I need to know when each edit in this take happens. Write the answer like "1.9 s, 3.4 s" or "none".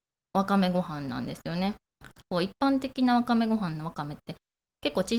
2.1 s